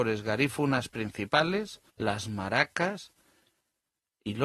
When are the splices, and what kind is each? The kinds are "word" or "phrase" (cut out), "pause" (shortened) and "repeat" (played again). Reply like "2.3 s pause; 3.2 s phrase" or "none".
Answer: 1.9 s pause